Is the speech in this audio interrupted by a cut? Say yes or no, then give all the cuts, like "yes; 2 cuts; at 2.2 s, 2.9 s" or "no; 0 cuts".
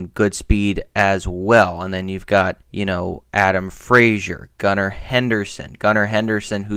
yes; 1 cut; at 2.6 s